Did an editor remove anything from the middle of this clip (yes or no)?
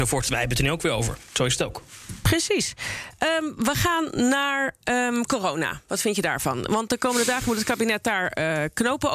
no